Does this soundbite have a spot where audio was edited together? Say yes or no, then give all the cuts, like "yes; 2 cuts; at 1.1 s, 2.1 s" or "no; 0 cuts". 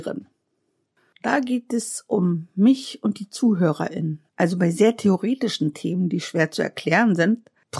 no; 0 cuts